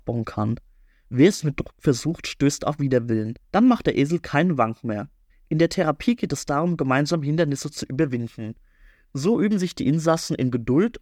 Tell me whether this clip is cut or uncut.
cut